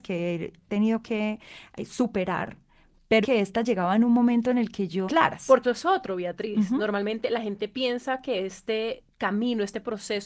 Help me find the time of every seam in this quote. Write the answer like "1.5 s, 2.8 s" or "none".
3.2 s, 5.1 s, 5.6 s